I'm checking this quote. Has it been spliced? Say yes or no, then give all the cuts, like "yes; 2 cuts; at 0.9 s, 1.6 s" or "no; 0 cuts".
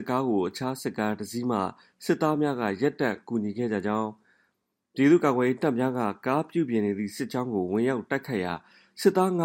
no; 0 cuts